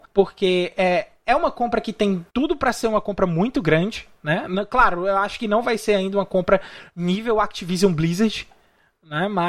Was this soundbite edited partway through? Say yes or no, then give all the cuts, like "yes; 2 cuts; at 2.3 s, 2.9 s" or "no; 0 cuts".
yes; 1 cut; at 2.3 s